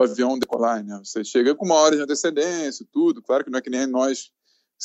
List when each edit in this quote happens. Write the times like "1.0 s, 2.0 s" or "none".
none